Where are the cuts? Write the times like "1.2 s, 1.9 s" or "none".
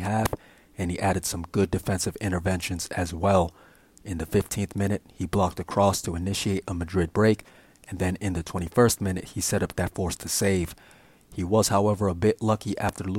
9.8 s